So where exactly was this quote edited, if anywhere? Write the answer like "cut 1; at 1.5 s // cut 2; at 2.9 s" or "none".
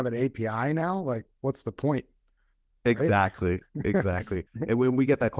cut 1; at 4.5 s